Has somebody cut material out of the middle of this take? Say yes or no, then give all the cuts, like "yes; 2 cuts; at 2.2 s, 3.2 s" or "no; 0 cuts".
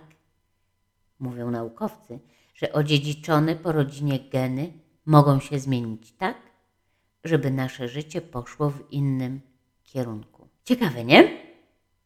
no; 0 cuts